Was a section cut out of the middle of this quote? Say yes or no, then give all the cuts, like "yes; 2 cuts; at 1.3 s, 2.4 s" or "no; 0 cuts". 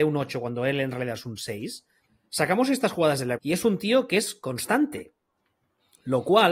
yes; 2 cuts; at 2.1 s, 3.4 s